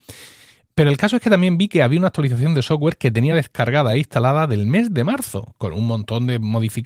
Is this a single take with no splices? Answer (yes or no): yes